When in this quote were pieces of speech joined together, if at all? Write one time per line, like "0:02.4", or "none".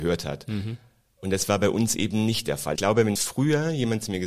0:02.8
0:03.2